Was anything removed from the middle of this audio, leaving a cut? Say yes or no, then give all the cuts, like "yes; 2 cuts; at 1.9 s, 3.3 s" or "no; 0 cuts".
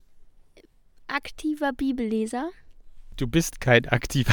no; 0 cuts